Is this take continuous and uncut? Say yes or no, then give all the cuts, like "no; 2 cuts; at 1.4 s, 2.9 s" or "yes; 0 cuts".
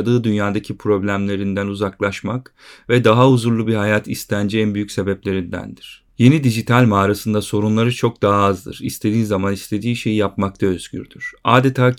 yes; 0 cuts